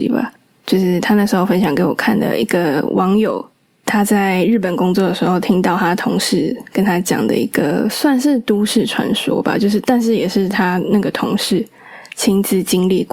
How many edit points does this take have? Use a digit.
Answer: 1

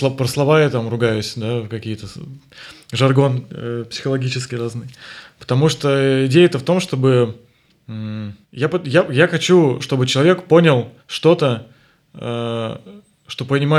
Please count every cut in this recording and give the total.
3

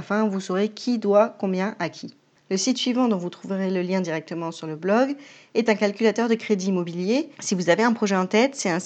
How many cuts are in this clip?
1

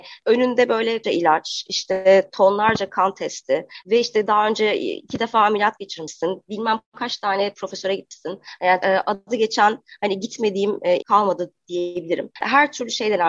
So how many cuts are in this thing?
3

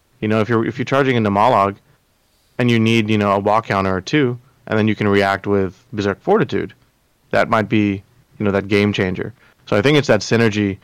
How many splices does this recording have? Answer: 0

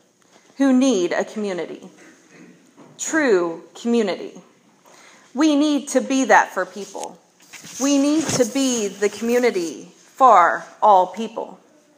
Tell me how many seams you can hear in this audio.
0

